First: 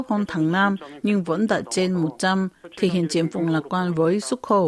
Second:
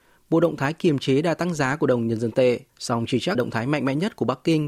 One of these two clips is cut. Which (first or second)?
second